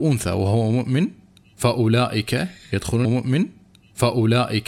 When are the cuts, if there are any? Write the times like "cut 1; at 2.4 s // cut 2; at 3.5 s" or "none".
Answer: cut 1; at 3.0 s